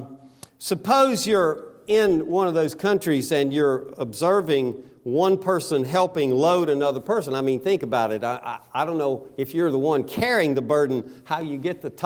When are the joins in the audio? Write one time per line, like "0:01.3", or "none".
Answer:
none